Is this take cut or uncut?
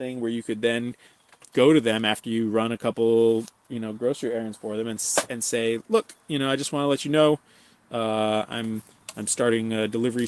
uncut